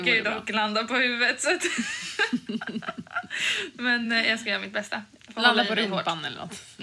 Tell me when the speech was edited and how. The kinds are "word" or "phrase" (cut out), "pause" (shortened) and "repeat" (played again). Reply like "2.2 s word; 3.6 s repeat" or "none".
none

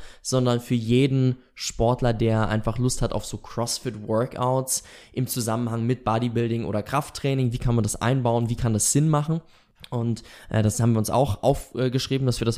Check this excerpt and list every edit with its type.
none

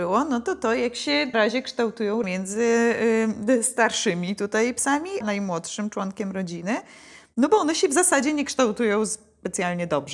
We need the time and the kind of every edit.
1.3 s word; 2.2 s word; 5.2 s word

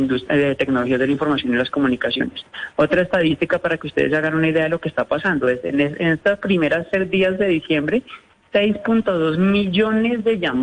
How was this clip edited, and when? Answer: none

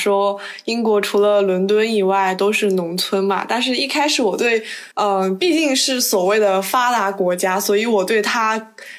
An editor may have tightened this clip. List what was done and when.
4.9 s pause

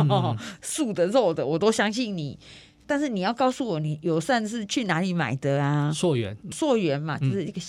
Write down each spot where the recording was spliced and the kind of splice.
6.5 s word

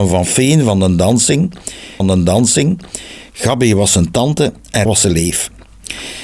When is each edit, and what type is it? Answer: 2.0 s repeat; 4.9 s word

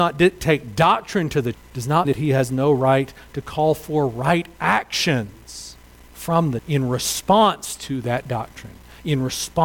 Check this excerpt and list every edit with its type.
1.5 s word; 2.0 s word; 6.6 s word

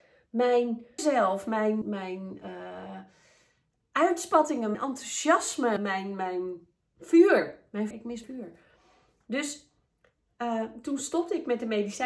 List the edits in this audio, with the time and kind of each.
1.0 s word; 1.8 s word; 4.7 s word; 5.8 s word; 7.9 s word; 8.2 s word

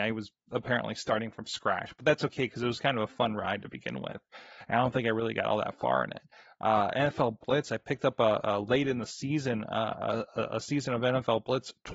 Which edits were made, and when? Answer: none

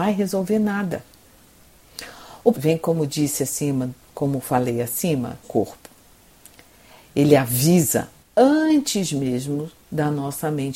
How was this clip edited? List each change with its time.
2.5 s phrase; 5.4 s phrase

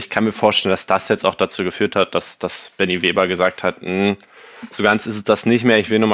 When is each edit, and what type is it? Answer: none

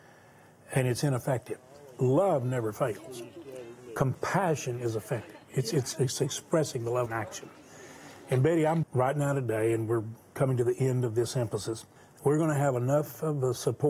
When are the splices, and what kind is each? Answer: 5.9 s word; 7.1 s phrase; 8.8 s phrase; 12.0 s pause

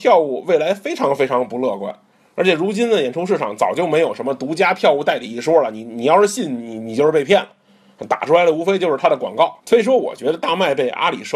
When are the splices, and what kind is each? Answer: 2.1 s pause; 9.6 s pause

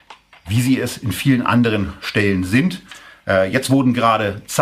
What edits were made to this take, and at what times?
none

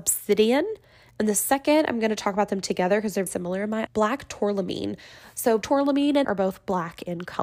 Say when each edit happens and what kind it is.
3.3 s word; 3.9 s word; 5.6 s word; 6.2 s word

